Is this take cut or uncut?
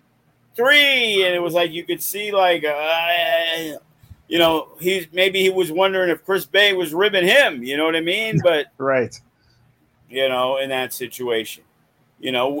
cut